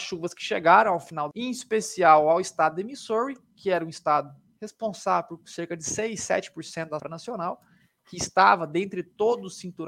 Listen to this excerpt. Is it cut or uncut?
cut